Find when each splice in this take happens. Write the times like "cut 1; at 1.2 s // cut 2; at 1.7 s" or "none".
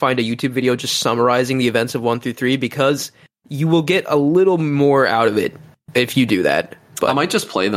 none